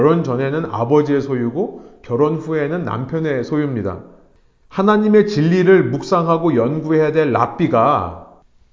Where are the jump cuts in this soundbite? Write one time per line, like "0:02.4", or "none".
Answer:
none